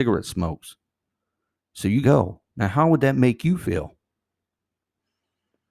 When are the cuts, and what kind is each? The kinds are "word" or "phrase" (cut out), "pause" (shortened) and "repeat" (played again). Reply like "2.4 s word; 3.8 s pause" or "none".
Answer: 2.0 s word